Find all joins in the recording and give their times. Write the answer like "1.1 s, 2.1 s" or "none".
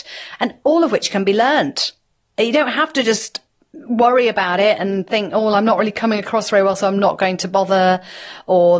none